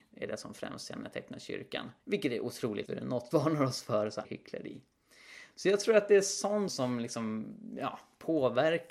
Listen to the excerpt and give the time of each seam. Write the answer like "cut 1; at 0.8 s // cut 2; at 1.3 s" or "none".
cut 1; at 2.0 s // cut 2; at 2.9 s // cut 3; at 3.3 s // cut 4; at 4.2 s // cut 5; at 6.7 s